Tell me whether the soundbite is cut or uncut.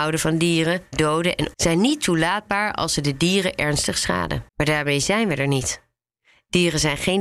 cut